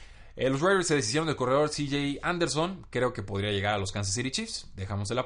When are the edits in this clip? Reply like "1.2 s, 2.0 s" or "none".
none